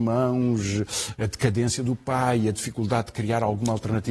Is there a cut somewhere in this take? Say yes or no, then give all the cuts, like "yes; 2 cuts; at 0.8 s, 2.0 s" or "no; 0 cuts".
yes; 1 cut; at 1.2 s